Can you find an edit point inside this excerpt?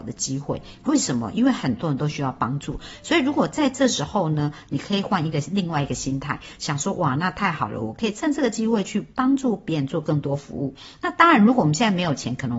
no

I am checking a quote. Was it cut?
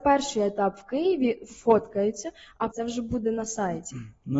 yes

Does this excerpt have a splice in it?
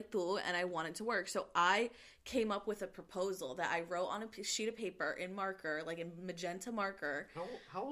no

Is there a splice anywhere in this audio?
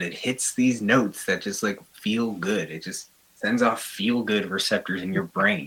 no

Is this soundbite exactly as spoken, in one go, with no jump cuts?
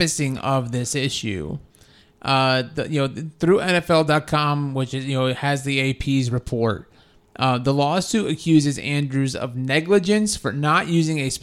yes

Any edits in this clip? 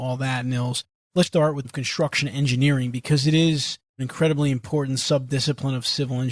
yes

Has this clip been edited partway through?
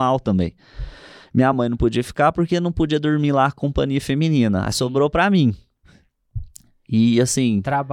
no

